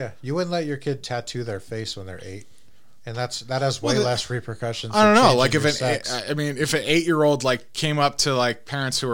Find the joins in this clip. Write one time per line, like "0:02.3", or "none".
none